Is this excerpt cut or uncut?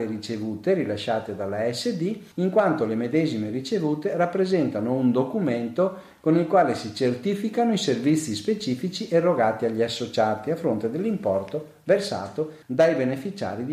cut